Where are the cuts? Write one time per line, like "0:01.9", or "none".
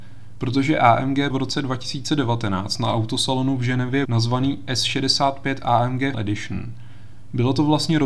0:01.3
0:04.0
0:06.1